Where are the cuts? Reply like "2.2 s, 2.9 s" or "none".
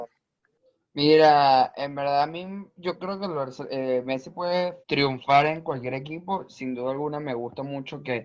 4.8 s